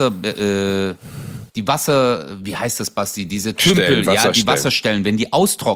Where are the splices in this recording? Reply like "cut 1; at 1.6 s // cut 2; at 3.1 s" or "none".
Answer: cut 1; at 1.5 s